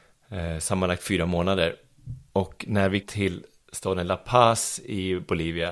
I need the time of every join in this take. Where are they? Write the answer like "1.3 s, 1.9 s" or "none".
3.0 s

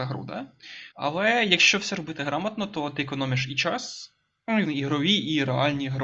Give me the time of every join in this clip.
0.9 s, 4.7 s

